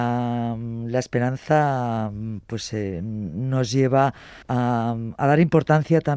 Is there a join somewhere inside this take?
yes; 1 cut; at 4.4 s

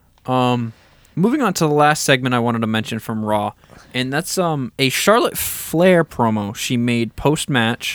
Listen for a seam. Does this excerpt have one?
no; 0 cuts

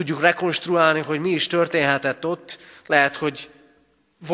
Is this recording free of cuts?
yes; 0 cuts

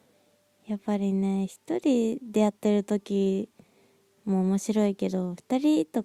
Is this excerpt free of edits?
yes; 0 cuts

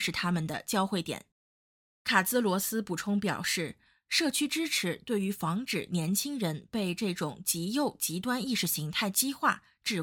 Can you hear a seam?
no; 0 cuts

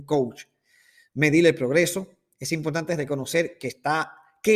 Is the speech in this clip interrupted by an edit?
no; 0 cuts

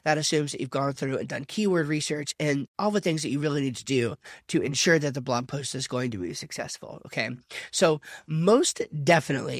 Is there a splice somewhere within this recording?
no; 0 cuts

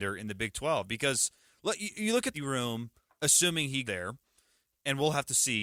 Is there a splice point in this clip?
yes; 2 cuts; at 2.3 s, 3.8 s

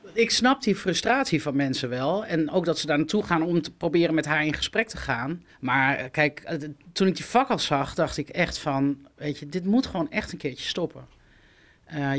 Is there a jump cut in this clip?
yes; 1 cut; at 5.5 s

